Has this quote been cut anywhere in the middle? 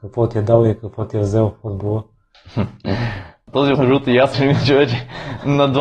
yes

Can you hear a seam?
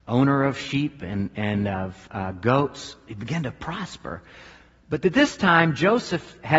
no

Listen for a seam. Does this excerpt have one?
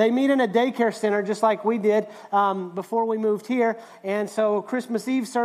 no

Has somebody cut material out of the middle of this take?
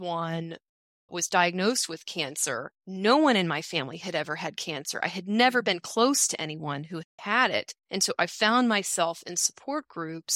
yes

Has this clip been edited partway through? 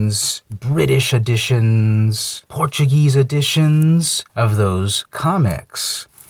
no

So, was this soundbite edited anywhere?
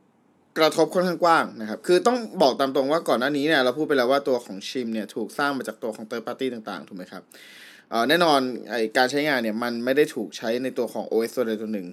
no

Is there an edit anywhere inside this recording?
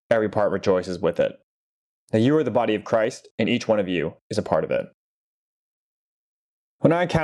no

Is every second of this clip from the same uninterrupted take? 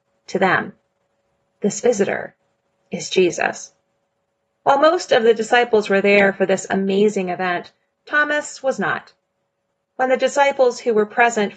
yes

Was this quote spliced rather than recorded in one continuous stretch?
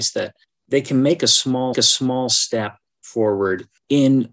yes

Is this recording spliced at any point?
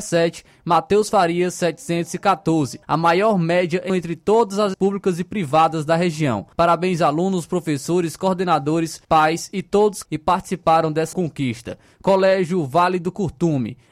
yes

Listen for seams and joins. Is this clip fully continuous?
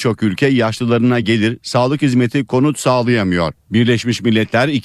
yes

